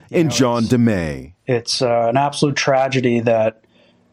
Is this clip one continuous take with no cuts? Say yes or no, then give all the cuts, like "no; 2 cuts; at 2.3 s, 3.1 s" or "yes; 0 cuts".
yes; 0 cuts